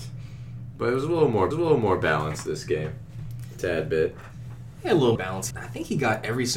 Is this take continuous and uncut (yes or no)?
no